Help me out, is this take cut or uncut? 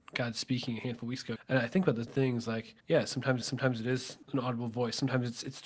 cut